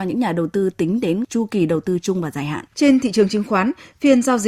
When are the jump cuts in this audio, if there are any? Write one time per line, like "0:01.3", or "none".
0:02.7